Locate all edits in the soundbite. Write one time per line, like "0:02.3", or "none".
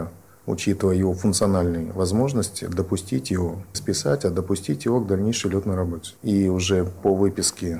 0:03.7
0:06.2